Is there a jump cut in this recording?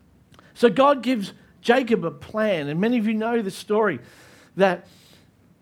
no; 0 cuts

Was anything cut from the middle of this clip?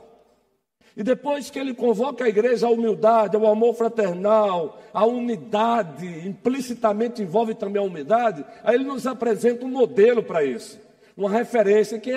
no; 0 cuts

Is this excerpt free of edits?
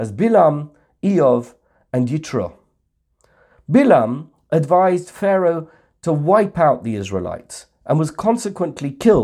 yes; 0 cuts

